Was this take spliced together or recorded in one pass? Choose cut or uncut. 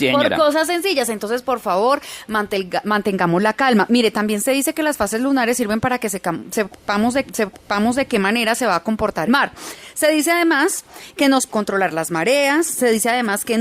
cut